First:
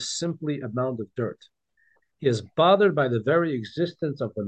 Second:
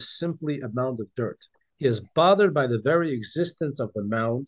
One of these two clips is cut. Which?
second; 1 cut; at 1.5 s

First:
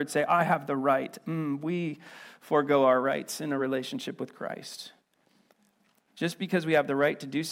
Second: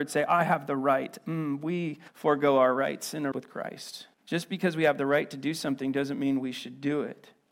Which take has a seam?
second; 3 cuts; at 2.1 s, 3.3 s, 4.1 s

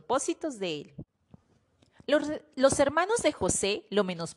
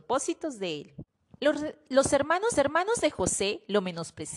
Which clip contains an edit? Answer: second; 2 cuts; at 1.4 s, 2.5 s

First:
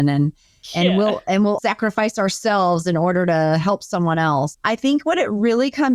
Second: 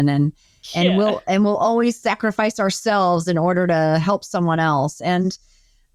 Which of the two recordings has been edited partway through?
first; 2 cuts; at 1.6 s, 4.5 s

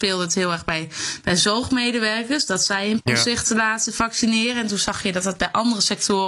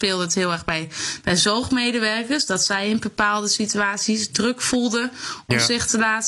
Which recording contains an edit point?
first; 1 cut; at 3.0 s

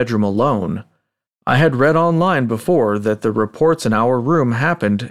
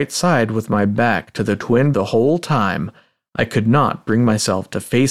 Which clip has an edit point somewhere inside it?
second; 1 cut; at 1.9 s

